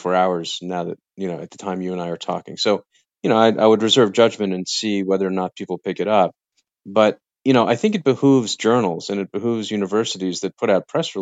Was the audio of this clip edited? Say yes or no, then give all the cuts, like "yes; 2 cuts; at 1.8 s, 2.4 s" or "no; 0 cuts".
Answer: no; 0 cuts